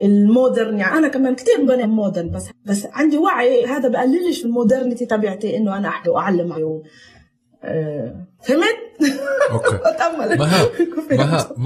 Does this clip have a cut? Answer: yes; 6 cuts; at 1.8 s, 2.5 s, 3.6 s, 4.4 s, 6.0 s, 6.5 s

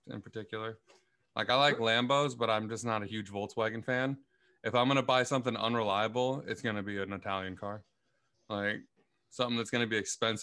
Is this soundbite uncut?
yes; 0 cuts

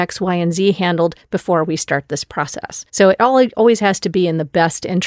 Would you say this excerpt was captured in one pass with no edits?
no; 1 cut; at 2.9 s

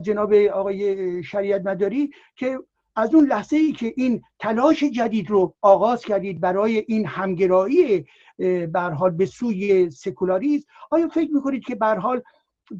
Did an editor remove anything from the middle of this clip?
no; 0 cuts

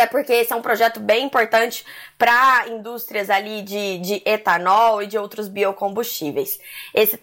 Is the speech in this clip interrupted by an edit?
no; 0 cuts

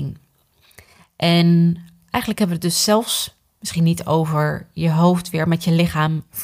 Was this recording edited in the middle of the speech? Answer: no; 0 cuts

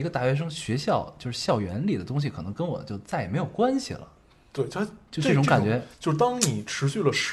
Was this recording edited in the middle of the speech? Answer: yes; 1 cut; at 5.9 s

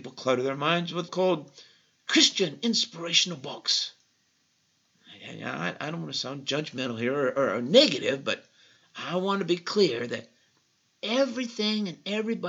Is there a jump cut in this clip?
yes; 1 cut; at 1.1 s

